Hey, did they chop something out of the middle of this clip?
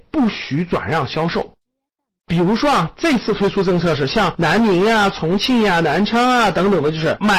no; 0 cuts

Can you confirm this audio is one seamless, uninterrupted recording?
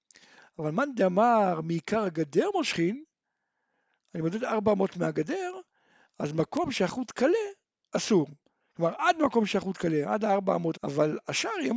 no; 1 cut; at 10.7 s

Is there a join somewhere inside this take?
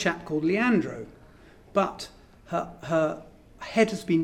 no; 0 cuts

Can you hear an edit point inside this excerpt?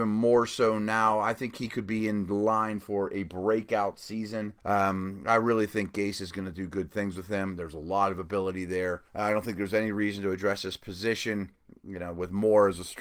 yes; 2 cuts; at 4.6 s, 9.1 s

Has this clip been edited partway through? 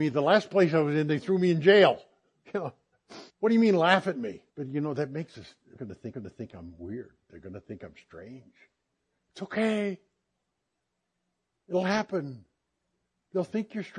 yes; 5 cuts; at 2.4 s, 3.3 s, 4.5 s, 5.8 s, 6.1 s

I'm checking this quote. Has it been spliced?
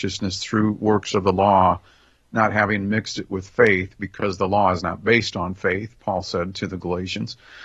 no; 0 cuts

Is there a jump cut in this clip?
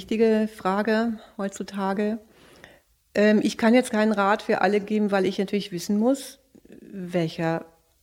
no; 0 cuts

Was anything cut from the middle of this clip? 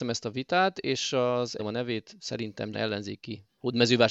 yes; 2 cuts; at 1.6 s, 2.7 s

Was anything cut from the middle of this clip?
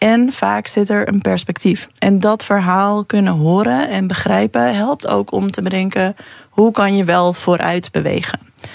no; 0 cuts

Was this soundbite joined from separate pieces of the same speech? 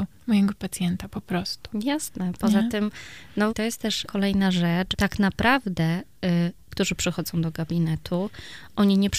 yes; 4 cuts; at 3.5 s, 4.0 s, 4.9 s, 6.7 s

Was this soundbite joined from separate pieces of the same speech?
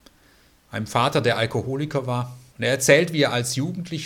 yes; 1 cut; at 2.5 s

